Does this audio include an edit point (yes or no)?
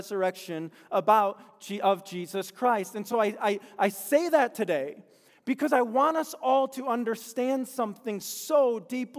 no